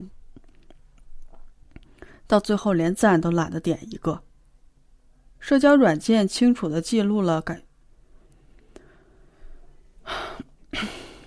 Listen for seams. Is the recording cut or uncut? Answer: uncut